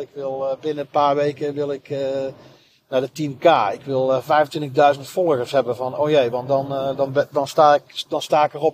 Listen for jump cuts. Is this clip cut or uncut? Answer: uncut